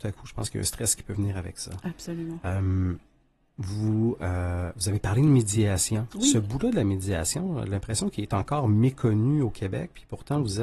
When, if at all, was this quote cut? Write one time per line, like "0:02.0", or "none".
none